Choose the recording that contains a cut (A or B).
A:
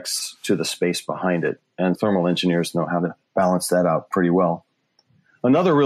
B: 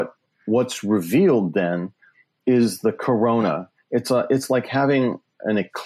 A